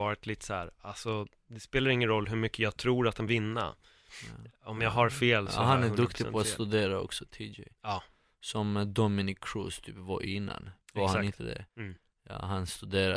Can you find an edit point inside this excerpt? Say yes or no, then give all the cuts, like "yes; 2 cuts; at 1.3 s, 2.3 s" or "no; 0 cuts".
yes; 3 cuts; at 3.3 s, 10.8 s, 11.7 s